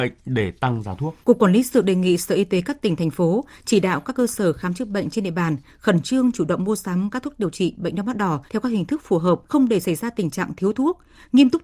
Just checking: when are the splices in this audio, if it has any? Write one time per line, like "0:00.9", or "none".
0:01.2
0:08.5
0:09.5